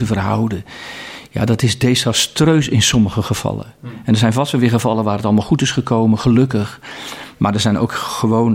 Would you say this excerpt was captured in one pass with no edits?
yes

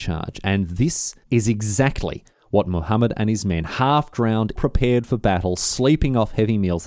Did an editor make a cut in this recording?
yes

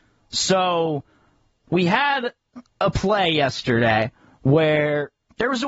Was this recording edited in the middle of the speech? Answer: yes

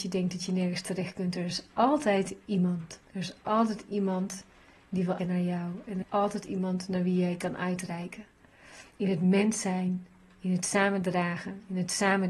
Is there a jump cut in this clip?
yes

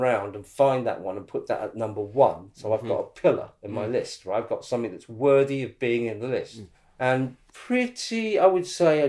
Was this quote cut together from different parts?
no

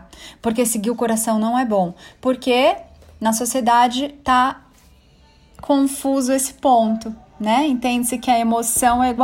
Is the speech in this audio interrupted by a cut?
no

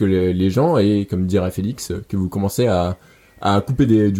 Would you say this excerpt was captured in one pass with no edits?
yes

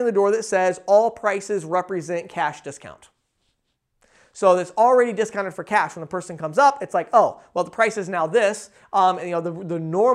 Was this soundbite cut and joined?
no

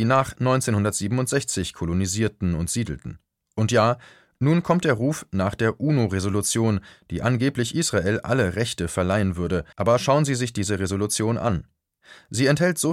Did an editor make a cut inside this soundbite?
yes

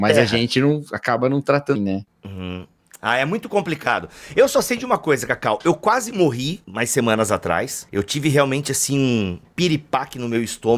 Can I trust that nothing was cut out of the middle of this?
no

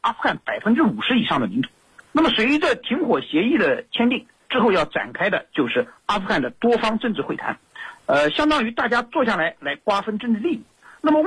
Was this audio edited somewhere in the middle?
no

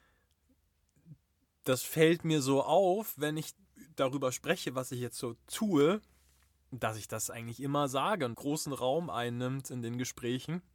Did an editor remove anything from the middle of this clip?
yes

